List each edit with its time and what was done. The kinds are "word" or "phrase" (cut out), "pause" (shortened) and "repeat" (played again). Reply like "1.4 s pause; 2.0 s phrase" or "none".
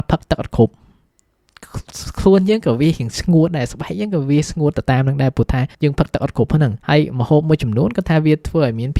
5.7 s pause; 6.8 s pause